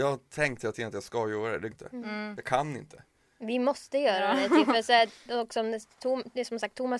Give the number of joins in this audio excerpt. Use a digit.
1